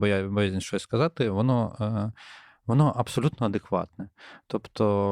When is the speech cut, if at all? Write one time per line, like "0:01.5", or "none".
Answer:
none